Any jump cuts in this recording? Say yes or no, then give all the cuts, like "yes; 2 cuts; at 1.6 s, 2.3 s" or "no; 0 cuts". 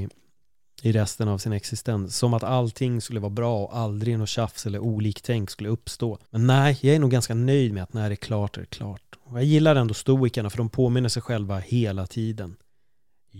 yes; 1 cut; at 6.3 s